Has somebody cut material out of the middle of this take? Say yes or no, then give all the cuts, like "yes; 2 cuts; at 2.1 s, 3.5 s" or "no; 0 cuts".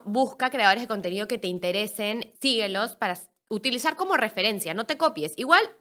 yes; 1 cut; at 2.3 s